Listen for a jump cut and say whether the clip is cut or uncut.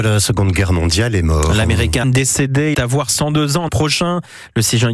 cut